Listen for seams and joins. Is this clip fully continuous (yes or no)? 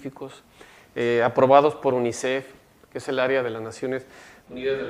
yes